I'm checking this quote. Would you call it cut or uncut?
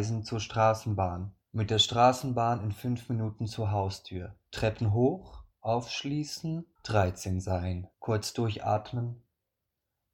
cut